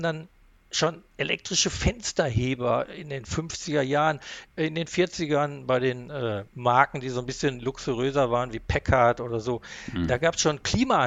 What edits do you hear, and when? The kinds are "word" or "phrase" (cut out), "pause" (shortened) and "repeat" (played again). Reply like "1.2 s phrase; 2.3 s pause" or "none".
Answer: 6.5 s pause